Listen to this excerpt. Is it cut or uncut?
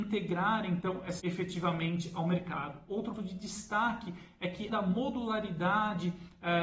cut